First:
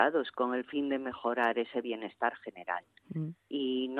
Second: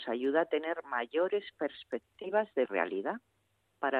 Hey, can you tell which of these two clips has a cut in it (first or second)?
second